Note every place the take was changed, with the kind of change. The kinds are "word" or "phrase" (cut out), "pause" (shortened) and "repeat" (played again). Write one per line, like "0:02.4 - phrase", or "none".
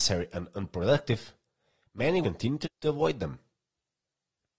0:02.2 - word
0:02.6 - word

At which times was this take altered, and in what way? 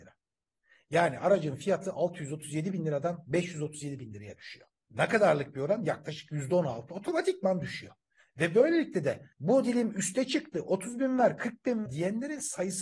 0:09.3 - pause
0:11.9 - word

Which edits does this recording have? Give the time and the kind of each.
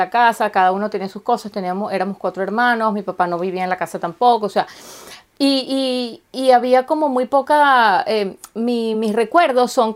none

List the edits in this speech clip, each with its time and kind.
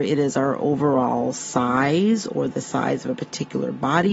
none

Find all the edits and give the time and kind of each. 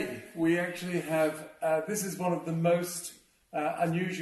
none

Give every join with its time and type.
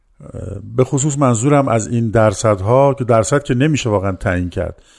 none

